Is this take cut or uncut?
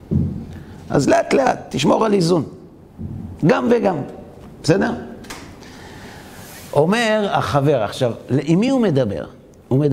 uncut